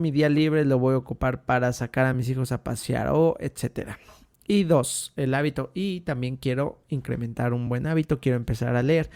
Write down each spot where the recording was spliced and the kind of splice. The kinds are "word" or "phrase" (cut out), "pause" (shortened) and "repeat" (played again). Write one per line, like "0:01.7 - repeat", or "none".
none